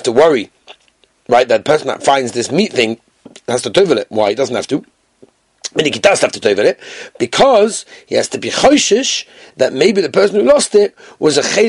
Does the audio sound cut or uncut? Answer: uncut